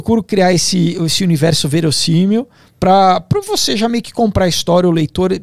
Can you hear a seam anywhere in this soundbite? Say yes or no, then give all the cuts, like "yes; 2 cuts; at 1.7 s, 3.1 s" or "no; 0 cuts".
no; 0 cuts